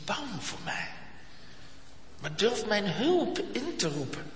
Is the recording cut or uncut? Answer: uncut